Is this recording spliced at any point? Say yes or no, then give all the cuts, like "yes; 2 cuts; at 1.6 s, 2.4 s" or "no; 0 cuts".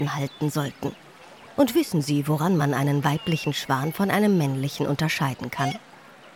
no; 0 cuts